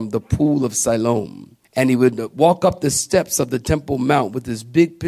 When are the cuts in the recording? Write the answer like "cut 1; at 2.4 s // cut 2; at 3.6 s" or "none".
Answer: cut 1; at 1.6 s